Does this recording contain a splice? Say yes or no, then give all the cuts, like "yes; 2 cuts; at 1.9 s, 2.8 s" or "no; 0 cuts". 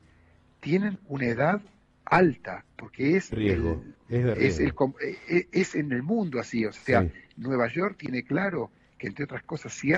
yes; 2 cuts; at 2.7 s, 3.3 s